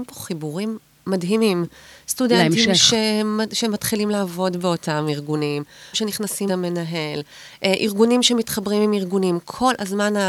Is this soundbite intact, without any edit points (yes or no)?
no